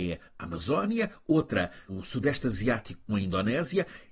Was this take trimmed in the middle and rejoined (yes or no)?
yes